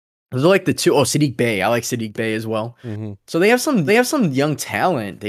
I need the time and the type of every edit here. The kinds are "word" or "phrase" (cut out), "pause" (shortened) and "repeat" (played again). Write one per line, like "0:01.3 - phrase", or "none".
0:03.9 - repeat